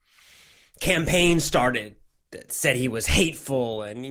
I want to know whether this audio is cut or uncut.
uncut